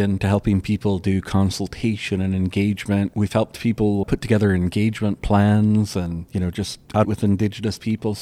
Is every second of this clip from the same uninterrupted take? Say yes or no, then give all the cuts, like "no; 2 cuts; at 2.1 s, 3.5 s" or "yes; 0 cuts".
no; 3 cuts; at 4.0 s, 6.3 s, 7.0 s